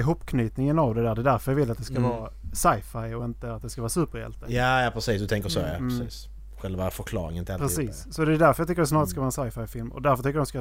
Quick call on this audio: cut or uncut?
uncut